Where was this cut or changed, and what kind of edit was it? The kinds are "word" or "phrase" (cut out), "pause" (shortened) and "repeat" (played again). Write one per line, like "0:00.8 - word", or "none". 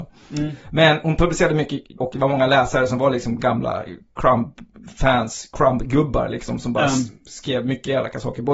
0:02.0 - word